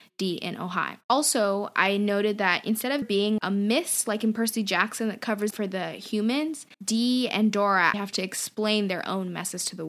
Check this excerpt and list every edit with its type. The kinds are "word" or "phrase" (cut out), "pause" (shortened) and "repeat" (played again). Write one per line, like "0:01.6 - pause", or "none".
0:01.0 - pause
0:03.0 - word
0:03.4 - word
0:05.5 - word
0:06.7 - pause
0:07.9 - word